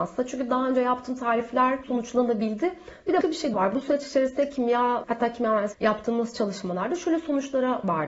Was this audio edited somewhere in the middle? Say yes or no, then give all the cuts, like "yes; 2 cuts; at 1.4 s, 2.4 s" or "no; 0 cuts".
yes; 5 cuts; at 1.8 s, 3.2 s, 3.5 s, 5.0 s, 5.7 s